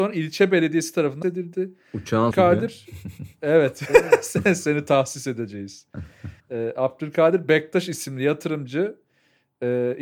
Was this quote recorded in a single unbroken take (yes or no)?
no